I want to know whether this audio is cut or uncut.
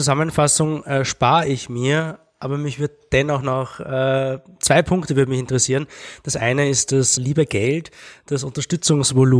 cut